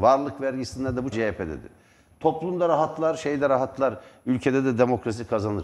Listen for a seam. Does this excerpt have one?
yes; 1 cut; at 1.1 s

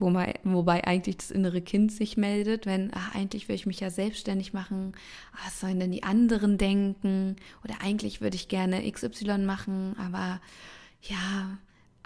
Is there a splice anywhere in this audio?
no; 0 cuts

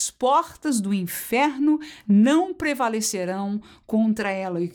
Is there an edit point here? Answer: no; 0 cuts

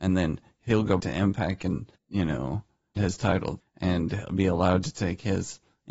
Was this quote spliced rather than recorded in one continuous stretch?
yes; 4 cuts; at 1.0 s, 2.0 s, 3.0 s, 3.6 s

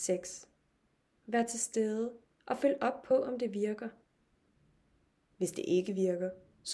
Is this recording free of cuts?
yes; 0 cuts

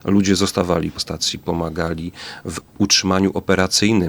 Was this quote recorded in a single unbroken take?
no; 1 cut; at 1.0 s

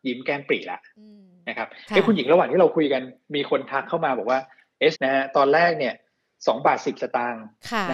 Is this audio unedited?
no; 1 cut; at 4.9 s

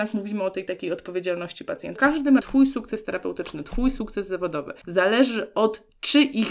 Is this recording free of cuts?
no; 2 cuts; at 2.0 s, 2.4 s

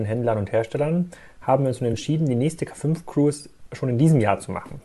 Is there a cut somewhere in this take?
no; 0 cuts

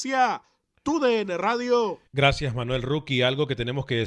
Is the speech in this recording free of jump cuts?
no; 1 cut; at 2.1 s

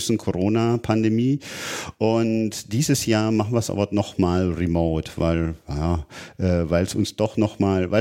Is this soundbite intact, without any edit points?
yes; 0 cuts

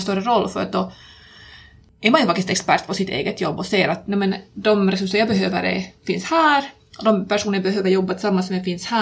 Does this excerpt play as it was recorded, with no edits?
no; 1 cut; at 4.5 s

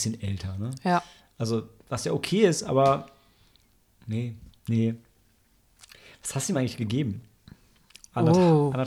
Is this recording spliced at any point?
no; 0 cuts

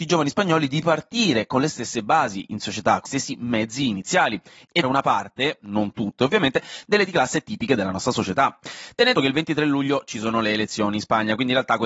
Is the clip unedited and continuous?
no; 4 cuts; at 3.1 s, 4.8 s, 7.1 s, 9.1 s

